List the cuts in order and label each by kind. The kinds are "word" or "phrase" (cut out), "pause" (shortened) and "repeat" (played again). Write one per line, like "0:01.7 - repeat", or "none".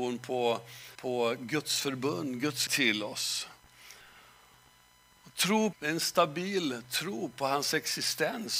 0:00.9 - pause
0:02.7 - word
0:05.7 - phrase